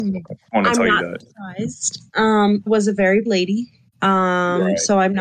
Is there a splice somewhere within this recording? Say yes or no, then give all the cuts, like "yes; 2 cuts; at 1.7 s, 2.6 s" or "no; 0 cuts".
yes; 2 cuts; at 2.7 s, 3.3 s